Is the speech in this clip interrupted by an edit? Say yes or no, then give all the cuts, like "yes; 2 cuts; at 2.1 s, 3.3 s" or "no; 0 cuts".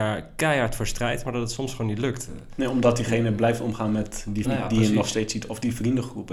yes; 1 cut; at 4.4 s